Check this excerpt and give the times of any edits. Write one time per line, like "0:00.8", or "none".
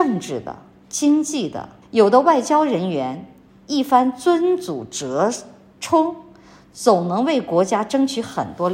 0:01.8